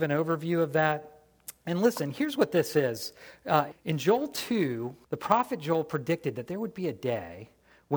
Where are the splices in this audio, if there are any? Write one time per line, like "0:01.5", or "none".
0:03.7
0:05.0